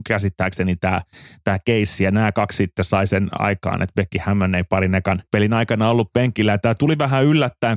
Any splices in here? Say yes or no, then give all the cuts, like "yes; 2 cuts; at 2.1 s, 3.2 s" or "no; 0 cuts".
yes; 1 cut; at 5.3 s